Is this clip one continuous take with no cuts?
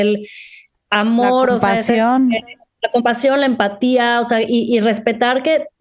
yes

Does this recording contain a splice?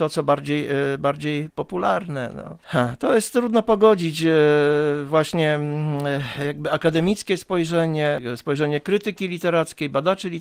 no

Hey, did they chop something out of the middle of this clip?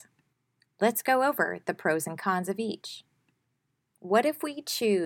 no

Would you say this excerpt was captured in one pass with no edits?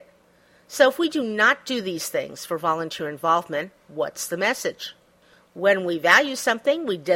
yes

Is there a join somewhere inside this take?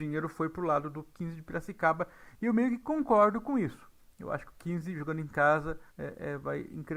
yes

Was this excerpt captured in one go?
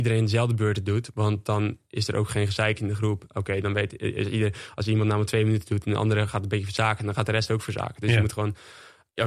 yes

